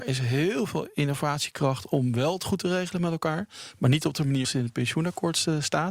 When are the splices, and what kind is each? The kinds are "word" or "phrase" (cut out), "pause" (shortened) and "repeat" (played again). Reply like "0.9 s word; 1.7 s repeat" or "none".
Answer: 4.4 s word